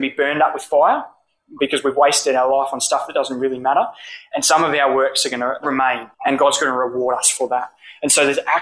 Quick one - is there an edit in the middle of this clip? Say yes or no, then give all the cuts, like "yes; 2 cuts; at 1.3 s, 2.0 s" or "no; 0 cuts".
yes; 1 cut; at 6.1 s